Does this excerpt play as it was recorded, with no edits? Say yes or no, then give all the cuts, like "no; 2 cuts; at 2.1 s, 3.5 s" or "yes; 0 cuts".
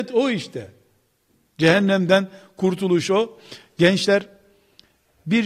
yes; 0 cuts